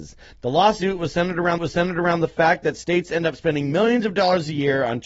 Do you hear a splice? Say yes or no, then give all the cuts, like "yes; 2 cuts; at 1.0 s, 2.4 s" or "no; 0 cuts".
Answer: yes; 1 cut; at 1.6 s